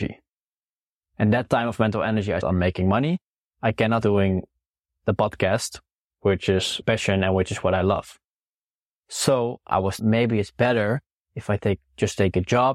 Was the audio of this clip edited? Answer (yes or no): yes